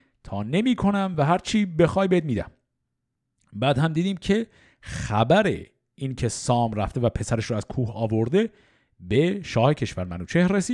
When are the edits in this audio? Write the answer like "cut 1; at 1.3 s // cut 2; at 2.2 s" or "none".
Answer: none